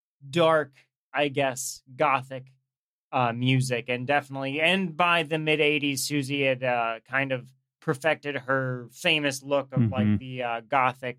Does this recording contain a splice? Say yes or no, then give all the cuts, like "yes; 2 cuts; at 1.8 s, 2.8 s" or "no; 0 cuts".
no; 0 cuts